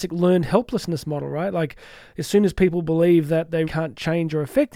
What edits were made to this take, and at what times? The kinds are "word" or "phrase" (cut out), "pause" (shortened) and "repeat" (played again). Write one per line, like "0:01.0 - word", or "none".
0:03.6 - word